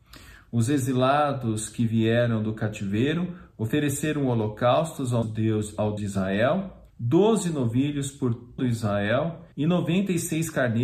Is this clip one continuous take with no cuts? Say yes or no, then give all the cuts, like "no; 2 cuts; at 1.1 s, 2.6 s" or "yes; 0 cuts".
no; 5 cuts; at 5.2 s, 6.0 s, 6.9 s, 8.6 s, 9.5 s